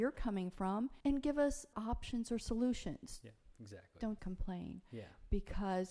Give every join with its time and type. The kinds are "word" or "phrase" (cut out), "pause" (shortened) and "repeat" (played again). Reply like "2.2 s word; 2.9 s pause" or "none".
1.0 s pause; 1.7 s word; 4.2 s word